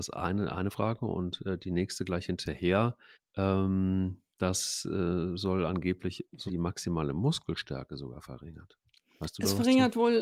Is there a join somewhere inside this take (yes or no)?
yes